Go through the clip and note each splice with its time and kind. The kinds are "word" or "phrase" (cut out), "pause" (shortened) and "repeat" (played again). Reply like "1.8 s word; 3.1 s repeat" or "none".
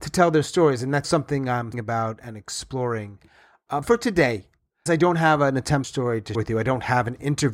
1.0 s word; 1.7 s word; 3.8 s word; 4.9 s word; 5.8 s word; 6.3 s word